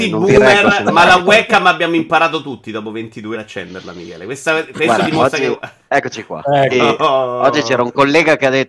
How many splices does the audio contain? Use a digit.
3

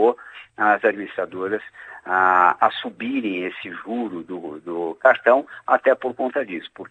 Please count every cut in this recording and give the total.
0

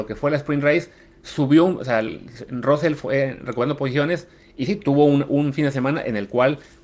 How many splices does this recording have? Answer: 0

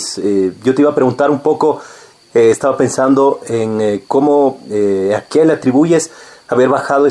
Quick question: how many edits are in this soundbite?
0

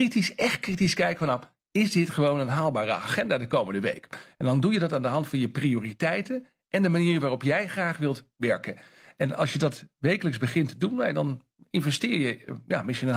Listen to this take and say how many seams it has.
0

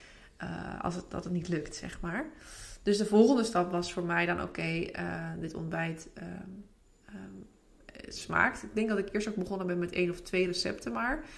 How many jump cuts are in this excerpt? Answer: 0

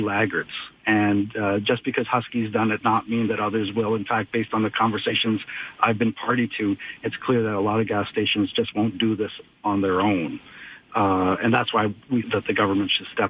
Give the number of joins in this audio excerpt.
2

